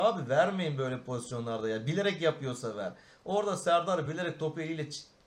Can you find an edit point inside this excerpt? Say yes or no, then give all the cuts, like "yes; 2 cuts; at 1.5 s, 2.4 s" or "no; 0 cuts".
no; 0 cuts